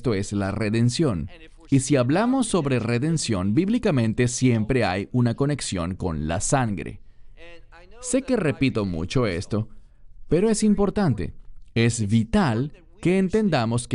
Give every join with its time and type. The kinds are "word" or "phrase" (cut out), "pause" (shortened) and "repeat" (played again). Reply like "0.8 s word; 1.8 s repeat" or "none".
none